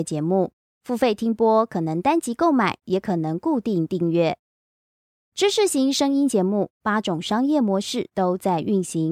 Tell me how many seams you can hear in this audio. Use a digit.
0